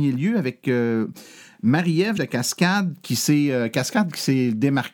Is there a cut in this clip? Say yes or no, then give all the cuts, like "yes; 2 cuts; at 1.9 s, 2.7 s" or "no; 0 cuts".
yes; 1 cut; at 2.2 s